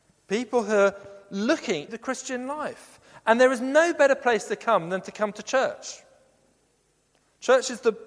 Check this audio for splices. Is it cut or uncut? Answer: cut